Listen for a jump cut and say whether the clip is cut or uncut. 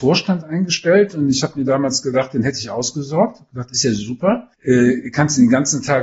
cut